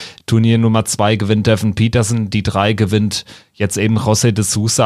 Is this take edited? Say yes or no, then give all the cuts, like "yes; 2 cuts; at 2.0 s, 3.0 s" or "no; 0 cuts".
no; 0 cuts